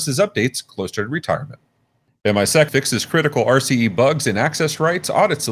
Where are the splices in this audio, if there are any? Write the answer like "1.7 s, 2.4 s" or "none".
2.7 s

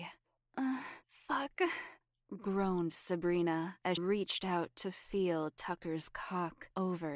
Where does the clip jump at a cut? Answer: 4.0 s

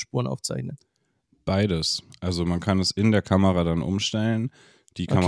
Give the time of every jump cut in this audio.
none

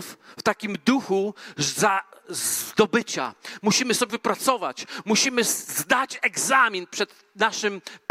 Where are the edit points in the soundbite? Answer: 4.1 s

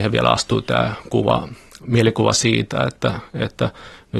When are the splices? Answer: none

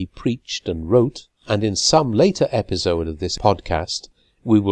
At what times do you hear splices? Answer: 1.4 s

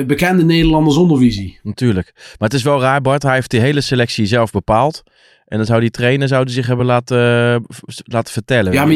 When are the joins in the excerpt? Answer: none

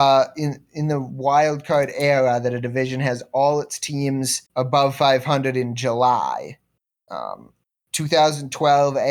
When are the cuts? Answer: 4.5 s

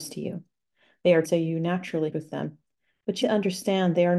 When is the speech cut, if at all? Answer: 1.2 s, 2.1 s, 3.2 s

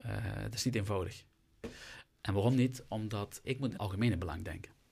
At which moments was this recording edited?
3.4 s, 3.8 s

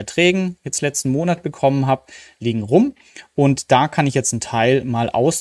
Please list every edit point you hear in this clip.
none

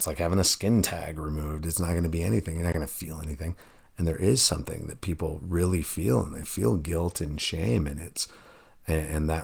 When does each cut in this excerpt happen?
none

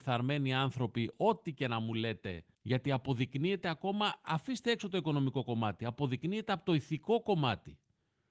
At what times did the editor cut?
2.5 s

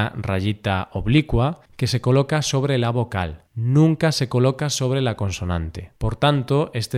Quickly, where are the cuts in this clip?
1.7 s, 3.5 s, 6.0 s

